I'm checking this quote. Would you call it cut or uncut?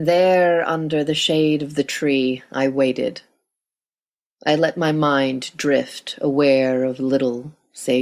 uncut